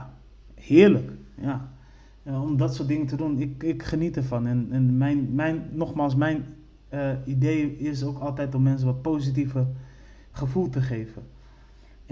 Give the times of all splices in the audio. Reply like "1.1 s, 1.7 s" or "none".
none